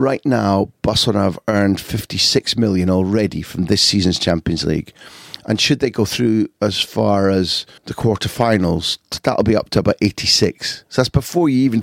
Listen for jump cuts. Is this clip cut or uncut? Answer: cut